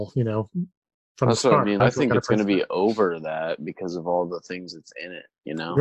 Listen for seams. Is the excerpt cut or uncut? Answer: cut